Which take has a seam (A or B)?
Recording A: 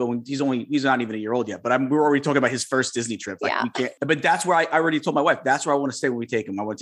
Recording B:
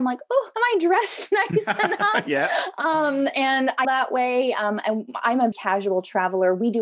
B